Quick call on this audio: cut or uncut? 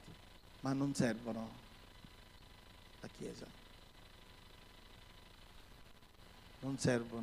uncut